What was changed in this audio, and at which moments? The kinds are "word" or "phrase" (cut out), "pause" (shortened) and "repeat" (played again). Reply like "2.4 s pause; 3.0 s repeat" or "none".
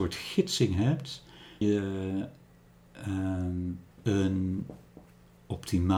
1.6 s word; 3.9 s pause